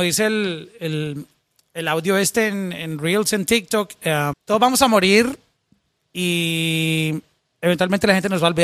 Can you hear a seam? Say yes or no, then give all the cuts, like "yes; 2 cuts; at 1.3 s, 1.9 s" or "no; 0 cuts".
yes; 1 cut; at 4.3 s